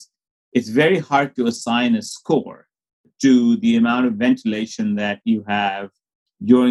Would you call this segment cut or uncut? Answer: uncut